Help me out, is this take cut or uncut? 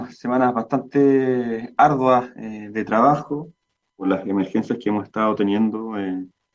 uncut